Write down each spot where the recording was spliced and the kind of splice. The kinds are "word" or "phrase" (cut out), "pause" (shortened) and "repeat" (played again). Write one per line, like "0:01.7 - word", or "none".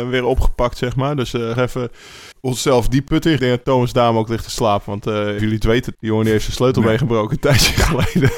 0:01.5 - word
0:02.3 - pause
0:03.1 - word
0:03.4 - phrase
0:05.4 - phrase
0:05.9 - phrase